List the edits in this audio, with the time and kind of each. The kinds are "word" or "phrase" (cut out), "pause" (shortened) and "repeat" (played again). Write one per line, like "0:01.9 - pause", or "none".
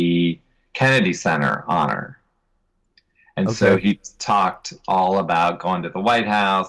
none